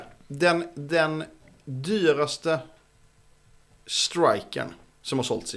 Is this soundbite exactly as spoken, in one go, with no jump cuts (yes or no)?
yes